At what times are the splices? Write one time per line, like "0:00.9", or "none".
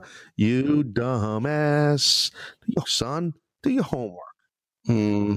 0:02.8